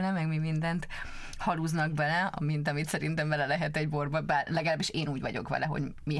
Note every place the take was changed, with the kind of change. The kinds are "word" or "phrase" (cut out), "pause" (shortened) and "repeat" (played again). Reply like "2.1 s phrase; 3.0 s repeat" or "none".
none